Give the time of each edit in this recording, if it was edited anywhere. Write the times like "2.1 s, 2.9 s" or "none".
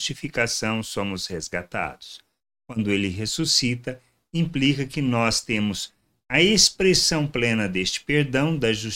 none